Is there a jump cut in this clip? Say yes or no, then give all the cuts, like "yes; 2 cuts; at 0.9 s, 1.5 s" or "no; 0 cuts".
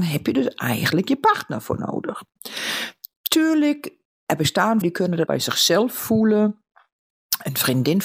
yes; 2 cuts; at 4.8 s, 5.3 s